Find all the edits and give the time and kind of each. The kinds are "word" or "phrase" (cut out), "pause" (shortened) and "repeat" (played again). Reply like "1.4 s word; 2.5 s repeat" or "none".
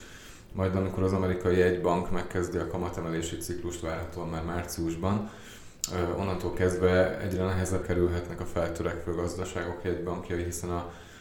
7.8 s word